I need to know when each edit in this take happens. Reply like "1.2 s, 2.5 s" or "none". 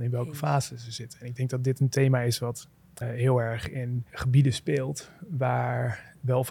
3.0 s, 4.1 s